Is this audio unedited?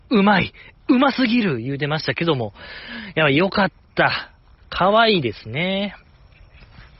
yes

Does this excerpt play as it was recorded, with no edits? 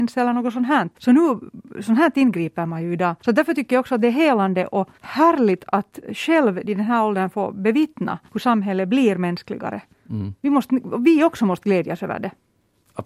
no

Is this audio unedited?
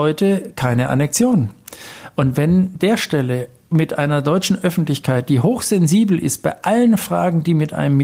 no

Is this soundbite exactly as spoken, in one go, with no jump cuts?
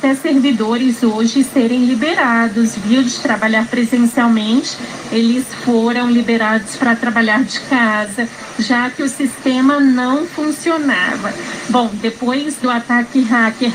yes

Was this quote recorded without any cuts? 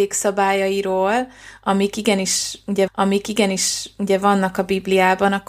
no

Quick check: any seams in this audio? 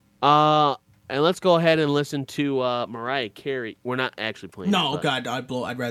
no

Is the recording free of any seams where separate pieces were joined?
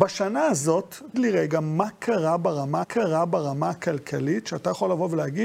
no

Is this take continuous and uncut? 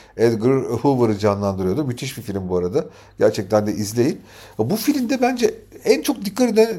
yes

